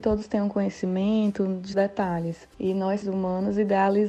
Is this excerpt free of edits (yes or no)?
no